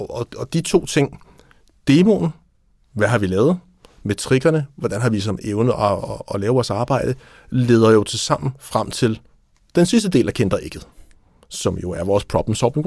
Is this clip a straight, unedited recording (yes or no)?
yes